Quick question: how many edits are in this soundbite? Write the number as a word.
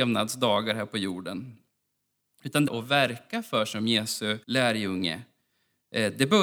two